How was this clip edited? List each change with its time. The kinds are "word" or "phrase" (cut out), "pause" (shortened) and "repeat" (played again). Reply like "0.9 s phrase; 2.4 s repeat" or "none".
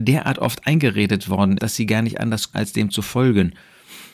1.6 s word; 2.5 s word

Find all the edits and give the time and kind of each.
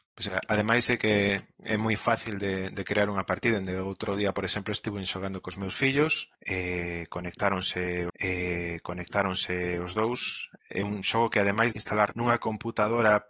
8.1 s repeat; 11.7 s phrase; 12.1 s word

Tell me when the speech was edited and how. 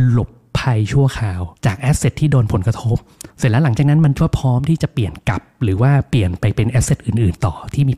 1.6 s pause; 3.3 s pause

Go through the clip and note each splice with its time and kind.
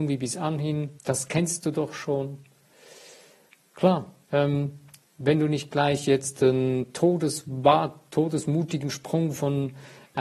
1.0 s pause; 4.2 s pause

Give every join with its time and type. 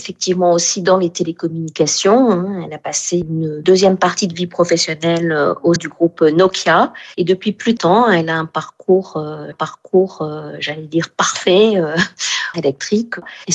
5.8 s word; 7.8 s word; 9.5 s repeat; 12.5 s phrase

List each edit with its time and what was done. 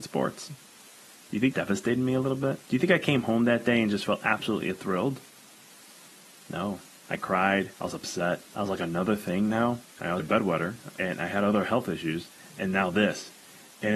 1.5 s word; 2.6 s pause; 7.0 s phrase; 7.8 s pause; 8.5 s pause; 9.9 s pause; 10.2 s word; 11.0 s word

